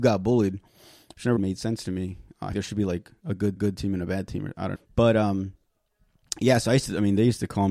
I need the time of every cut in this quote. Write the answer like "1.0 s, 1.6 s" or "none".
1.4 s, 2.5 s, 3.6 s, 4.8 s